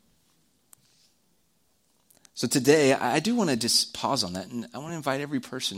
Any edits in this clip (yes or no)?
no